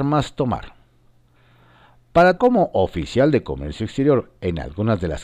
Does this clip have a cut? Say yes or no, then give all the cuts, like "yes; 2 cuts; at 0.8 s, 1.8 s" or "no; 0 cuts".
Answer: yes; 1 cut; at 2.4 s